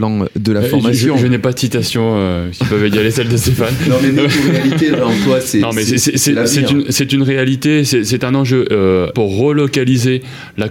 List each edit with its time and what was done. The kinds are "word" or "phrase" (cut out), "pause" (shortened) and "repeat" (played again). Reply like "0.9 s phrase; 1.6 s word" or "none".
9.1 s phrase